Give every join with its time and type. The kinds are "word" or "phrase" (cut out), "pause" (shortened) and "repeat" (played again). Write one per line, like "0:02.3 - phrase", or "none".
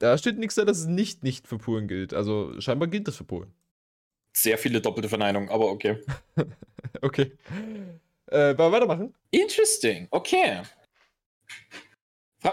0:03.7 - pause
0:09.2 - pause